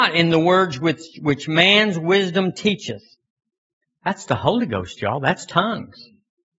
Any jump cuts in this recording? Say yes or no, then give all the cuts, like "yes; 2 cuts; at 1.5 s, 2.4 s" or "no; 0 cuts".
no; 0 cuts